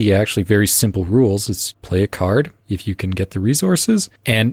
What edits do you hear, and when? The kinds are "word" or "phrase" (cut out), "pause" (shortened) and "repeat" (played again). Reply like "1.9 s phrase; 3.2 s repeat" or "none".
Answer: 1.7 s word